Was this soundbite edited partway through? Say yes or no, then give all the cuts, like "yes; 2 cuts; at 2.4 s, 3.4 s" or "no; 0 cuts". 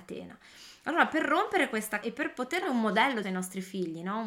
yes; 3 cuts; at 2.0 s, 2.6 s, 3.2 s